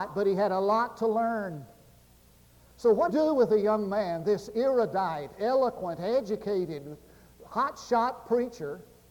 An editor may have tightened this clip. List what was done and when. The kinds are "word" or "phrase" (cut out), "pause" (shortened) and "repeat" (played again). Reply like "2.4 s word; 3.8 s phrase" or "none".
3.1 s phrase